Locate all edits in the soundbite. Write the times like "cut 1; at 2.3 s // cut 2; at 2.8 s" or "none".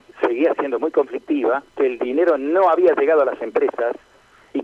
cut 1; at 1.7 s